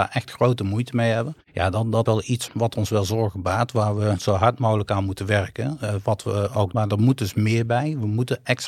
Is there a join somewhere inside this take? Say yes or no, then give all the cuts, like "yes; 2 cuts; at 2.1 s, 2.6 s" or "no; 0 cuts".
yes; 4 cuts; at 1.4 s, 2.1 s, 2.5 s, 6.7 s